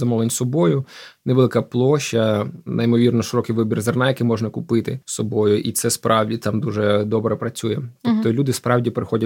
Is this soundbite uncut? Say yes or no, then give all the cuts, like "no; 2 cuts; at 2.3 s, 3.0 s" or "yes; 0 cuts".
no; 1 cut; at 5.0 s